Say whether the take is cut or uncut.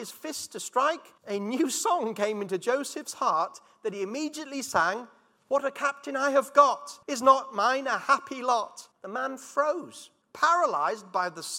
cut